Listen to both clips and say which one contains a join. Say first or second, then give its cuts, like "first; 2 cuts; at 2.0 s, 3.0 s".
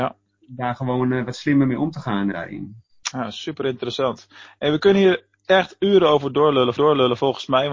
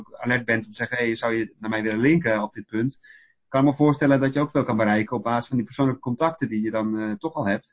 first; 2 cuts; at 2.3 s, 6.8 s